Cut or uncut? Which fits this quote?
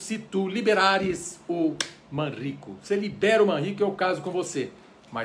uncut